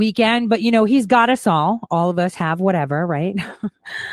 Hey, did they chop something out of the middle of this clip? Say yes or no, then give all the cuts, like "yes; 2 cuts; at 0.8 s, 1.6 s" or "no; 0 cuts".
no; 0 cuts